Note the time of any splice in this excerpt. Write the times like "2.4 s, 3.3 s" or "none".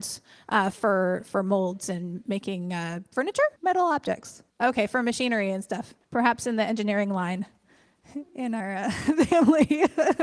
3.6 s, 4.5 s, 6.0 s